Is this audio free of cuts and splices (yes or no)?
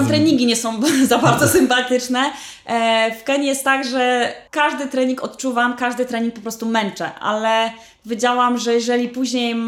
no